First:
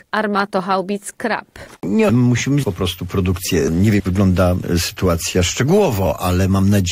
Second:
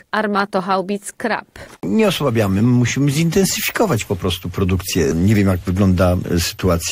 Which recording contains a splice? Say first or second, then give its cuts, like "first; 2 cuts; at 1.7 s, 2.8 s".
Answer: first; 3 cuts; at 2.1 s, 2.6 s, 4.0 s